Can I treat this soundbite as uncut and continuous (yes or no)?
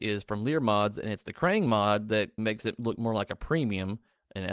no